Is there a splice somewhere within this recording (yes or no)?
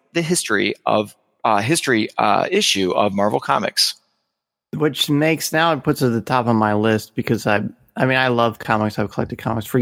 no